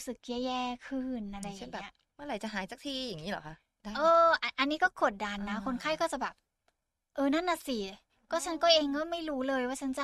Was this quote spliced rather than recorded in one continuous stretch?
no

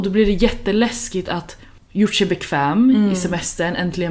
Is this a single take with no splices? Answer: yes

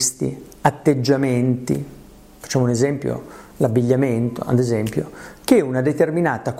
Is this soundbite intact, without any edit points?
yes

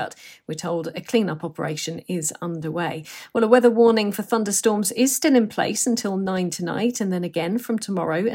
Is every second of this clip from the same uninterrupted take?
yes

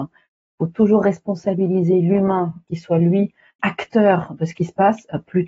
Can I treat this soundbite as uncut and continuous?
no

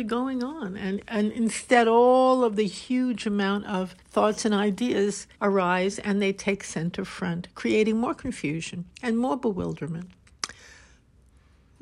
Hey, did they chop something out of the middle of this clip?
yes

